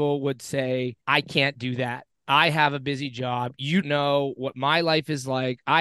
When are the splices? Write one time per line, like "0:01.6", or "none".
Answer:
0:01.0
0:03.8